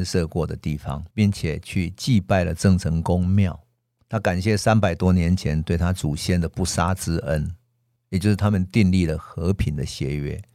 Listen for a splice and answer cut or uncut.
cut